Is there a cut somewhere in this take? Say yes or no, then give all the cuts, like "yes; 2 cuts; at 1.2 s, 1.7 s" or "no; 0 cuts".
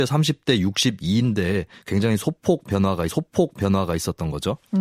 yes; 1 cut; at 3.1 s